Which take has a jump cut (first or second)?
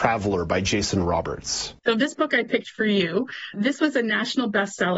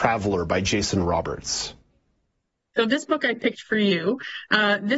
first